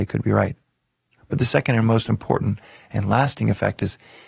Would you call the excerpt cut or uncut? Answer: uncut